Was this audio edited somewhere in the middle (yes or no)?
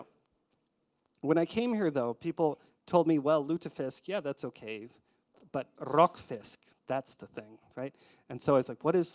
no